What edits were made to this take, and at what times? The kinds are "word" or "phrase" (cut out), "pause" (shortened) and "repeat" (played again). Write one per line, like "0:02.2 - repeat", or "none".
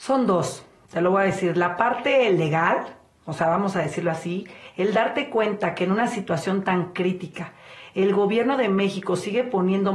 none